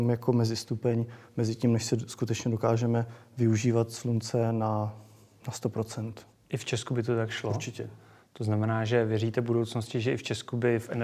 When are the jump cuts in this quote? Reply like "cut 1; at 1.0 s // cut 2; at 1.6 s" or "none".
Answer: none